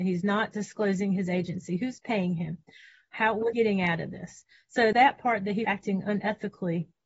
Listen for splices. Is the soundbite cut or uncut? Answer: cut